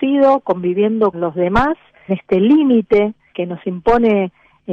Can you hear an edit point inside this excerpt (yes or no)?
yes